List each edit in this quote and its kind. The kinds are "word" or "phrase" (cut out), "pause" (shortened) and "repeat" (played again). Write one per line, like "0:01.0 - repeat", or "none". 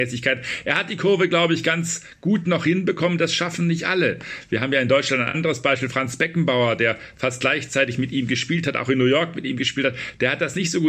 none